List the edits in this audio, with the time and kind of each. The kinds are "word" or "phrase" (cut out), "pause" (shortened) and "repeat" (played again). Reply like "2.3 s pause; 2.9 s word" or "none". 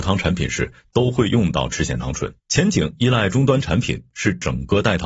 2.4 s pause